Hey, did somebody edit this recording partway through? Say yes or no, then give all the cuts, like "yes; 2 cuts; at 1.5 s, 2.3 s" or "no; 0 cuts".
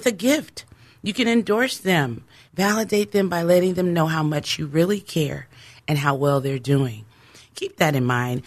no; 0 cuts